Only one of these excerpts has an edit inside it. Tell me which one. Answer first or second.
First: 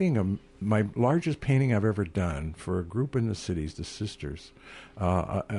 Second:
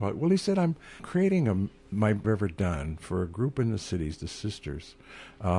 second